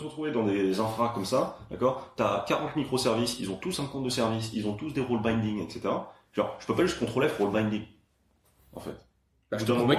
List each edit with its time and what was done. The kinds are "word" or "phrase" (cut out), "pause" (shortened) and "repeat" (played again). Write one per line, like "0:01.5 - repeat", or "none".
none